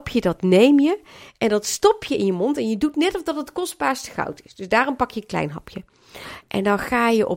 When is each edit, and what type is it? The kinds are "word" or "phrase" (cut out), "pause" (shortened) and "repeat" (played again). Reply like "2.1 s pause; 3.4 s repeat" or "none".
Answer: none

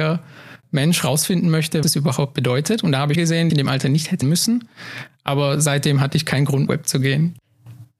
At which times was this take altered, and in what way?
1.8 s word; 3.1 s phrase; 3.5 s phrase; 4.2 s word; 6.7 s phrase

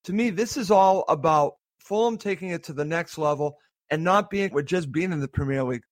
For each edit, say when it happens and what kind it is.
4.5 s word

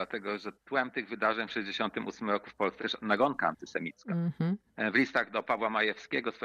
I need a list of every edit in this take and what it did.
2.8 s word

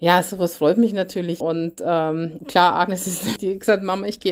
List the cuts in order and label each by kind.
1.4 s word; 2.4 s word; 3.4 s word

